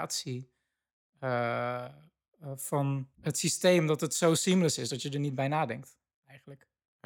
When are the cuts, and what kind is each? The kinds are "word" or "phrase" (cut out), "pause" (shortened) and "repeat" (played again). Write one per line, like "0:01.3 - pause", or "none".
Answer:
0:03.1 - pause